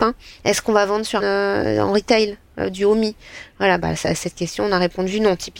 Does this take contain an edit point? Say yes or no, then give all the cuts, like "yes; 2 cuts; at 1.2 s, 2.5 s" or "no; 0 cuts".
yes; 1 cut; at 1.2 s